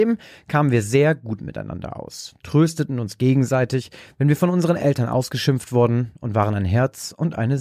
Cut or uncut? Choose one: uncut